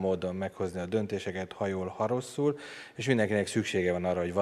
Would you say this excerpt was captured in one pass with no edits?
yes; 0 cuts

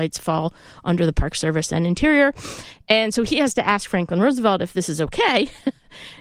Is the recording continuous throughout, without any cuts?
yes; 0 cuts

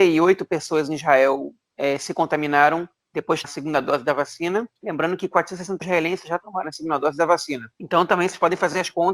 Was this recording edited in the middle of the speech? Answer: yes; 4 cuts; at 3.4 s, 4.8 s, 5.8 s, 7.7 s

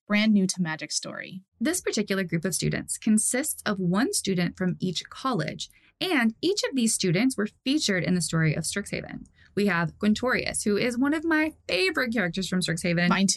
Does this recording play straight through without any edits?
yes; 0 cuts

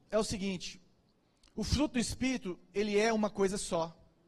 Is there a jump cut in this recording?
no; 0 cuts

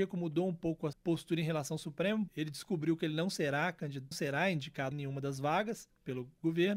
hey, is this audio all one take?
no; 4 cuts; at 0.9 s, 2.3 s, 4.1 s, 4.9 s

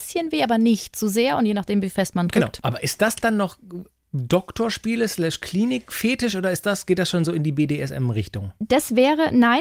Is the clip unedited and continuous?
yes; 0 cuts

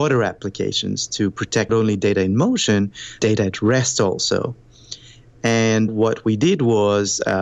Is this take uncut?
no; 3 cuts; at 1.7 s, 3.2 s, 5.9 s

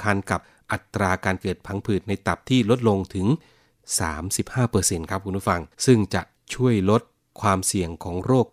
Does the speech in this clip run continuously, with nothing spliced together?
no; 1 cut; at 5.7 s

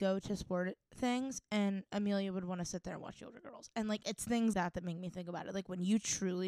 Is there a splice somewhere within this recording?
yes; 1 cut; at 4.5 s

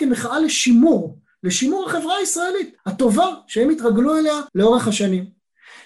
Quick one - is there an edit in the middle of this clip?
yes; 2 cuts; at 2.8 s, 4.5 s

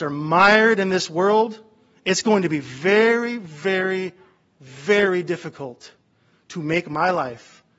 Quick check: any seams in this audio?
no; 0 cuts

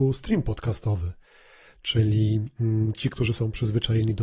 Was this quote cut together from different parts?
no; 0 cuts

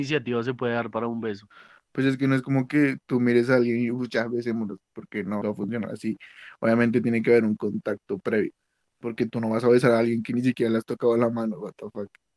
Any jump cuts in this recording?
yes; 1 cut; at 5.4 s

